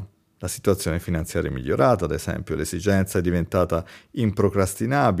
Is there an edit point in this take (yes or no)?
no